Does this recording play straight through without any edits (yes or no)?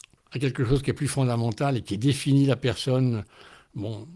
yes